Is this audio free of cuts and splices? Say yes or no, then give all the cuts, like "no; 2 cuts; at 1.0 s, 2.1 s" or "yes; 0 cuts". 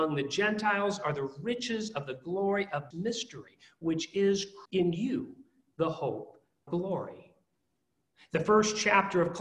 no; 3 cuts; at 2.9 s, 4.7 s, 6.7 s